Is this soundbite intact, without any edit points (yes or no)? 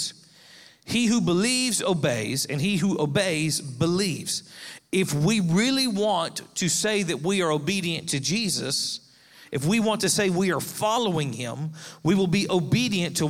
yes